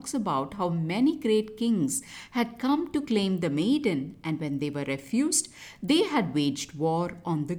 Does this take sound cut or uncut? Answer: uncut